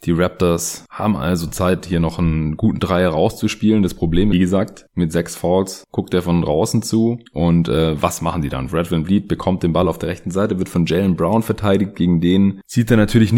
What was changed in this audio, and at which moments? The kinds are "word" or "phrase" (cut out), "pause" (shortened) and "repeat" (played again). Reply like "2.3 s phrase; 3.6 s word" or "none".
4.3 s phrase